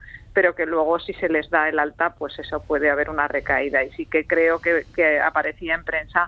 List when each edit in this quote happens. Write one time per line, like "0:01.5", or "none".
none